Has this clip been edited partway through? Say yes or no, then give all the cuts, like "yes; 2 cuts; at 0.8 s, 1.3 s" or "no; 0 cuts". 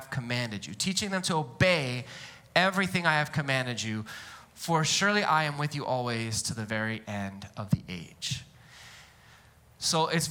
no; 0 cuts